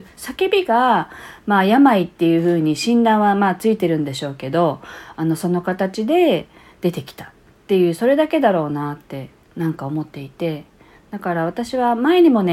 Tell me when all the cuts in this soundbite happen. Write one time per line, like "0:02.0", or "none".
none